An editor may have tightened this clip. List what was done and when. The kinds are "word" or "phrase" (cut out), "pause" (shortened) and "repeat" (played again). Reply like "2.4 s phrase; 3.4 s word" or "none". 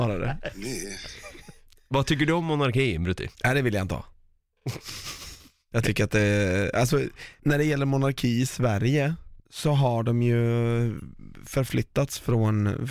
3.3 s pause